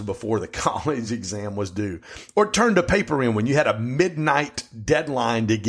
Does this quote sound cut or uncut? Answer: uncut